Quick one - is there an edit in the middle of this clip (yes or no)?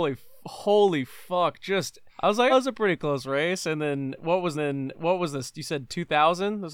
yes